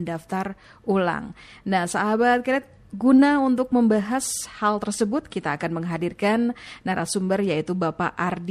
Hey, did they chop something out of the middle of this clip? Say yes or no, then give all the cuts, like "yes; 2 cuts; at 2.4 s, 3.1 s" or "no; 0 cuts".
no; 0 cuts